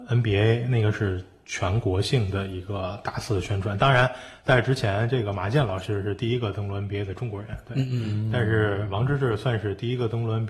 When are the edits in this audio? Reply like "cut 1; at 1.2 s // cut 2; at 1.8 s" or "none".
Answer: none